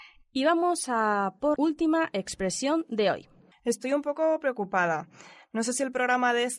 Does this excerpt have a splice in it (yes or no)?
yes